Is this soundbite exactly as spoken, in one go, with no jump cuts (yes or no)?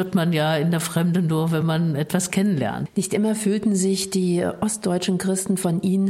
yes